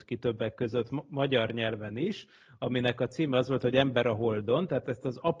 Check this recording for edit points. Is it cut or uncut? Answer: uncut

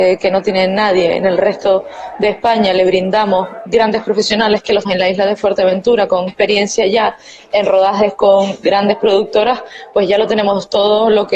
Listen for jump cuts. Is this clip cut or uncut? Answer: cut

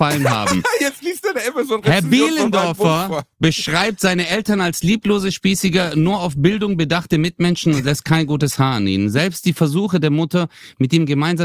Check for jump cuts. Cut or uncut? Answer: uncut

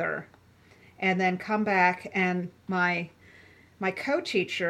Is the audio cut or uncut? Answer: uncut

